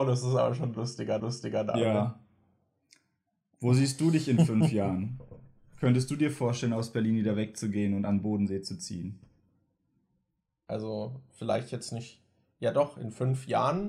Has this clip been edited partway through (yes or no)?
yes